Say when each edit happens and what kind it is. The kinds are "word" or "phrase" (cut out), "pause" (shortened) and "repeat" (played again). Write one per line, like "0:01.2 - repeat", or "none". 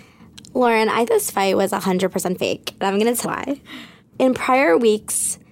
0:01.1 - word
0:03.2 - word
0:04.0 - word

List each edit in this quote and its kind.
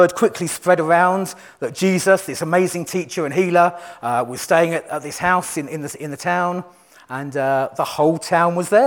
none

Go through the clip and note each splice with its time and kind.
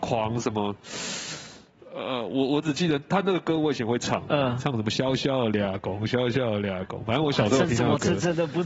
none

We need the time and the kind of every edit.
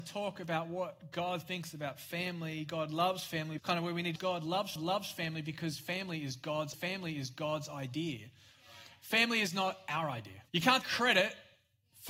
0:03.6 - phrase
0:04.2 - phrase
0:04.8 - repeat
0:06.7 - repeat
0:10.5 - pause
0:10.8 - word

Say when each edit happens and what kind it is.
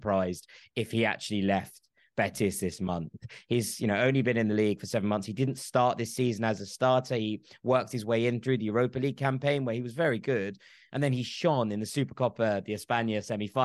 none

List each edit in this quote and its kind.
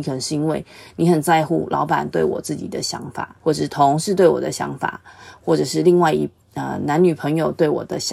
0:03.4 - pause

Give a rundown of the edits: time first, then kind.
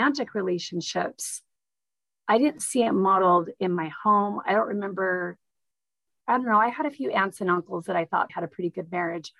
0:08.3 - word

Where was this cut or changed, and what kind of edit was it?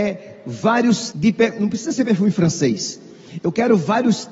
0:01.1 - word

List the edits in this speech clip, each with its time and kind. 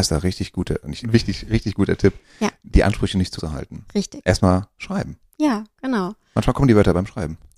0:01.0 - phrase
0:03.4 - word

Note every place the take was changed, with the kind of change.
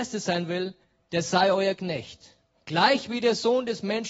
0:02.5 - pause

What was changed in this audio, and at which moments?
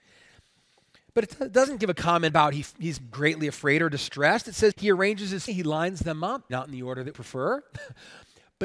0:02.3 - word
0:04.7 - word
0:05.5 - word
0:06.5 - word
0:07.1 - word

